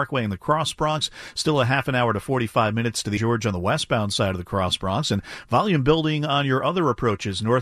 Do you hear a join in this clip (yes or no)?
yes